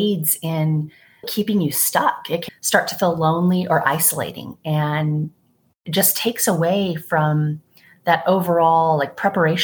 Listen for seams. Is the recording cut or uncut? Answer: cut